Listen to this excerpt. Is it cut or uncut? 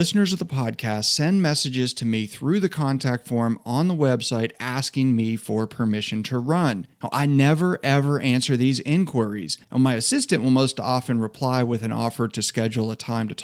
cut